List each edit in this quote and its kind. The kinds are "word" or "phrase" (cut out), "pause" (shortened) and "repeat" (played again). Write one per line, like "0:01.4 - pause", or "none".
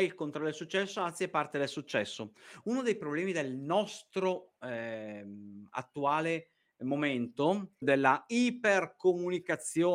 0:07.8 - word